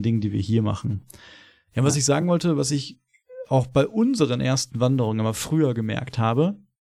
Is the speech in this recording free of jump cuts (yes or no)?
yes